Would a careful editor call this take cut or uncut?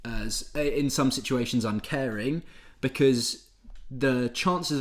uncut